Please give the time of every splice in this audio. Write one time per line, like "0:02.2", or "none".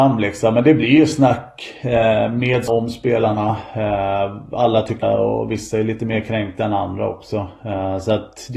0:02.7
0:05.0